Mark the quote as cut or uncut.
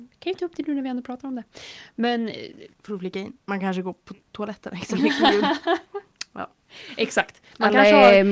cut